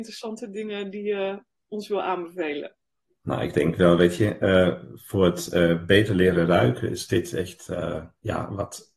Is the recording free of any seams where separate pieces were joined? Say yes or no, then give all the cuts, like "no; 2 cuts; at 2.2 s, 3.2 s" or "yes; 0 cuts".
yes; 0 cuts